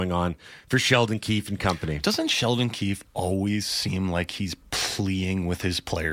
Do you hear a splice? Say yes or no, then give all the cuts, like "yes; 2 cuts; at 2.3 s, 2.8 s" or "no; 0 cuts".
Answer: no; 0 cuts